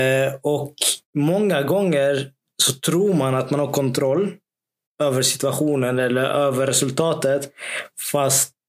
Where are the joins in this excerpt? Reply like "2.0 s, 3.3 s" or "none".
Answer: none